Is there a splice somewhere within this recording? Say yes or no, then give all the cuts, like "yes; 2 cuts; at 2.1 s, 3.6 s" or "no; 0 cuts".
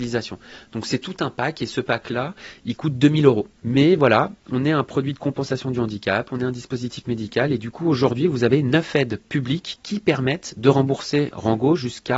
no; 0 cuts